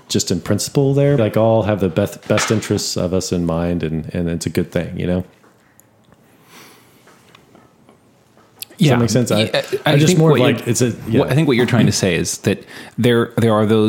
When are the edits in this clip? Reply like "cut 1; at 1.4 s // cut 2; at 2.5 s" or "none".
cut 1; at 1.2 s